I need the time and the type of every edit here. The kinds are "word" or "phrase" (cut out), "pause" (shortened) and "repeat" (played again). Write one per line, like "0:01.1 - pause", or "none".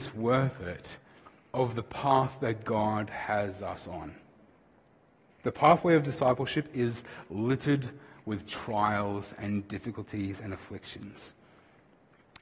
none